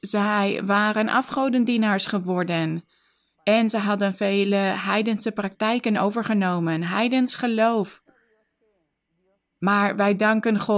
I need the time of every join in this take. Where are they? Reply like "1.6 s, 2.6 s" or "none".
none